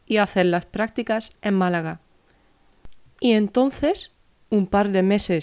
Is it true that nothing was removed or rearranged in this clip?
no; 2 cuts; at 1.4 s, 3.1 s

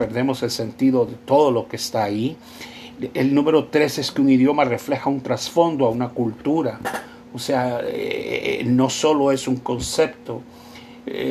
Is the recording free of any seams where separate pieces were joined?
yes; 0 cuts

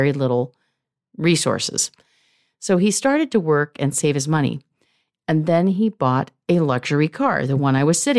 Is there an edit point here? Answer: no; 0 cuts

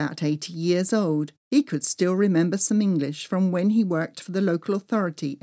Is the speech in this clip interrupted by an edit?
yes; 1 cut; at 1.4 s

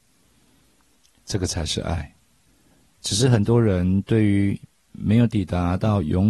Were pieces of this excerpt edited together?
yes; 1 cut; at 2.5 s

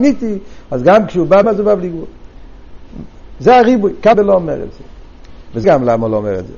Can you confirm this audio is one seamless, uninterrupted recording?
no; 3 cuts; at 1.4 s, 4.1 s, 5.6 s

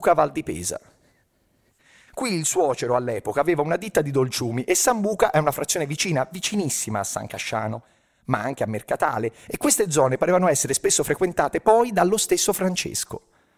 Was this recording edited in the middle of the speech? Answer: no; 0 cuts

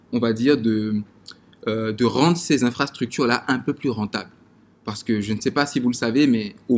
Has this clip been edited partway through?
no; 0 cuts

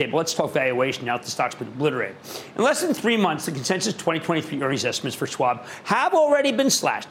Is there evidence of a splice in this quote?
no; 0 cuts

